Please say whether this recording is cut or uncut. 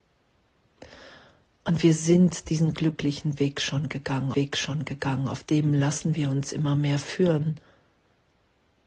cut